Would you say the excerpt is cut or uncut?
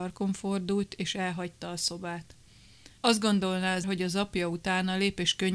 cut